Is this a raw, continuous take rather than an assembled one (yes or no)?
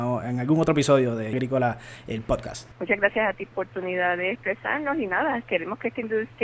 no